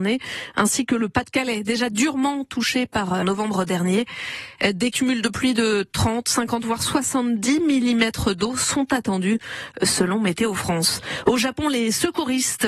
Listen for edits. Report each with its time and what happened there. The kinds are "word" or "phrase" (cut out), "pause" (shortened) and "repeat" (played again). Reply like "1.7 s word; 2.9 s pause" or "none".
3.2 s phrase